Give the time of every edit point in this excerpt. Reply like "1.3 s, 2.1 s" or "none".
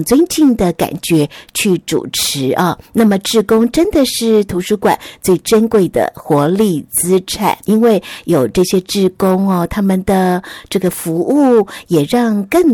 2.9 s, 7.6 s

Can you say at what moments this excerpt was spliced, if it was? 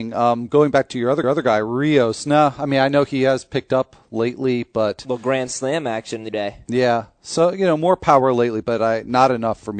1.2 s, 6.3 s

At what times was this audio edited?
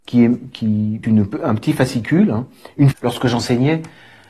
1.0 s, 2.9 s

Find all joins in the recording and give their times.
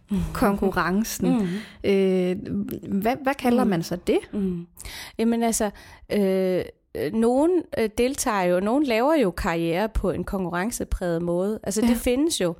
none

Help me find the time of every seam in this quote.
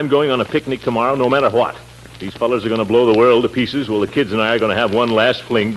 none

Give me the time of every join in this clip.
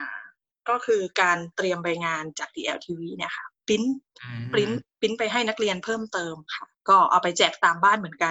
6.4 s

